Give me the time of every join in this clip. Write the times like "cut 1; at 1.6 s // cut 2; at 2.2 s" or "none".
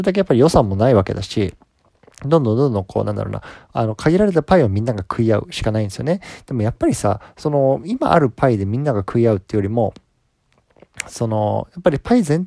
none